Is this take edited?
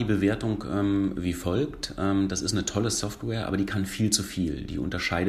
no; 0 cuts

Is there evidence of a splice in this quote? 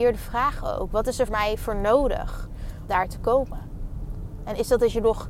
yes; 2 cuts; at 1.3 s, 2.9 s

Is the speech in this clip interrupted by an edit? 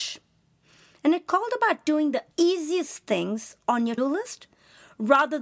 yes; 2 cuts; at 2.3 s, 4.0 s

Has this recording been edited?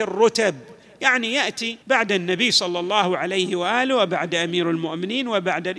yes; 1 cut; at 1.8 s

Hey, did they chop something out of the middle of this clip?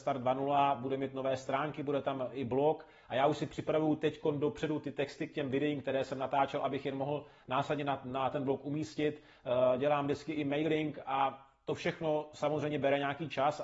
no; 0 cuts

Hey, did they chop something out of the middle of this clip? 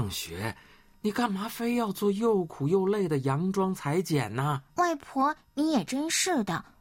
yes; 1 cut; at 4.7 s

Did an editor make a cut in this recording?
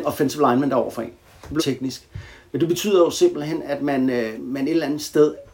yes; 2 cuts; at 1.6 s, 4.4 s

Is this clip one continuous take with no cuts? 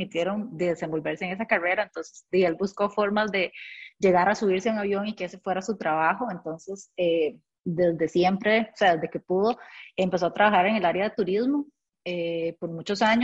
yes; 0 cuts

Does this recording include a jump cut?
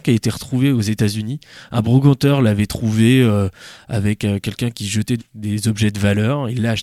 yes; 1 cut; at 5.2 s

